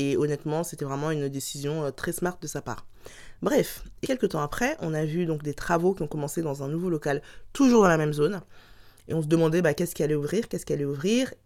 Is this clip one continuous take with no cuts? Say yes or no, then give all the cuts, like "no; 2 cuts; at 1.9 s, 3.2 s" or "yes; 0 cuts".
no; 1 cut; at 4.0 s